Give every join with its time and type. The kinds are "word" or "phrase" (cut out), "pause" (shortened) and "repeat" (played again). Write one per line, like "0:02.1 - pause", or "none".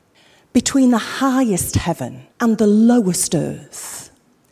0:02.3 - pause

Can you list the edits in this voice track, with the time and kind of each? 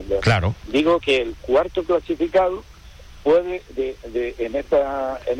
none

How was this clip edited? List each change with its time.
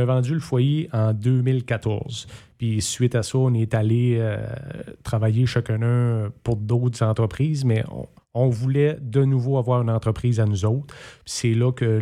0:08.2 - pause

